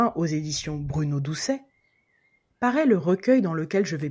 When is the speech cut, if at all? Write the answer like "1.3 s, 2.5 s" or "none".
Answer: none